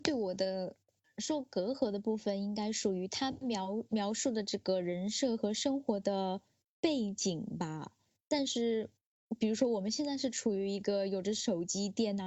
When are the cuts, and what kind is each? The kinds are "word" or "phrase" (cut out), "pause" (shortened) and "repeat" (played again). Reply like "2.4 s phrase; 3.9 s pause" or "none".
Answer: none